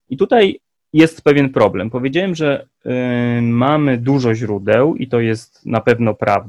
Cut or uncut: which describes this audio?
uncut